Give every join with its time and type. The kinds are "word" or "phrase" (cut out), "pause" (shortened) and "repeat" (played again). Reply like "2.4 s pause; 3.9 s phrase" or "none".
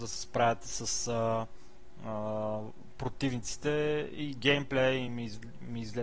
none

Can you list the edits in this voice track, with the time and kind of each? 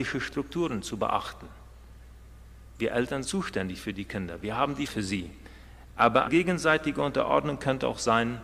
2.7 s pause; 3.2 s word; 4.9 s word; 6.3 s word

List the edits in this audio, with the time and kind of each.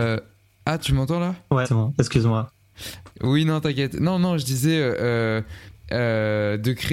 1.6 s word; 3.1 s pause

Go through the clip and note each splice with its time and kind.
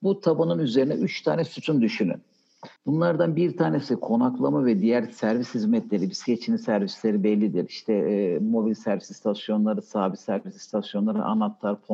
2.8 s pause

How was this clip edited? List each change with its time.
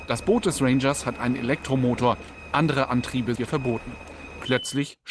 3.4 s word

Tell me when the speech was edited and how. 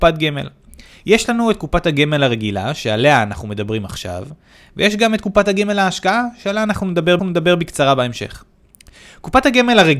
7.2 s repeat

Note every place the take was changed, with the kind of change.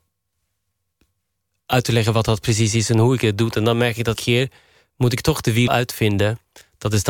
4.2 s word; 5.7 s word

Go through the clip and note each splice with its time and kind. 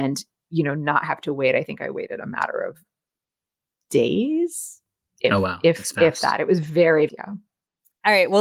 7.1 s phrase

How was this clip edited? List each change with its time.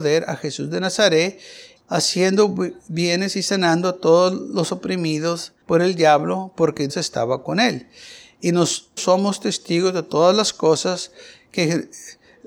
1.8 s phrase; 5.6 s pause; 6.9 s word; 9.0 s phrase

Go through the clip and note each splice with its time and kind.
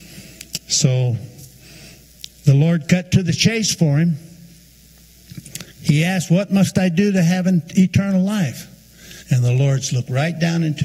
5.7 s pause; 9.2 s pause

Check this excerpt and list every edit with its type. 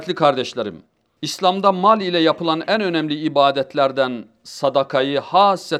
none

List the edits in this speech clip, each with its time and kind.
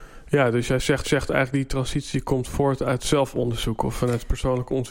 1.0 s repeat

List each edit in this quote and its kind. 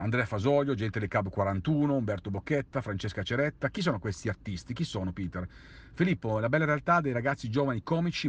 none

